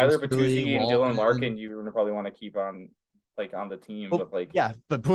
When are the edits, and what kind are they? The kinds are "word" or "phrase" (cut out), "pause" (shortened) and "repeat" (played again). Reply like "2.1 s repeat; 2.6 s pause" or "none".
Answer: none